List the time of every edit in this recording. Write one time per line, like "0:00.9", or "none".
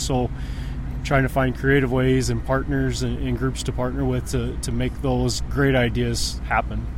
none